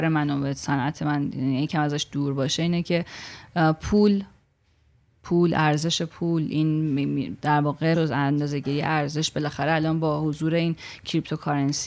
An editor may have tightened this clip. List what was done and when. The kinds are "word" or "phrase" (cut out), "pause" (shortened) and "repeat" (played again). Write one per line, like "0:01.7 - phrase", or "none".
0:07.9 - phrase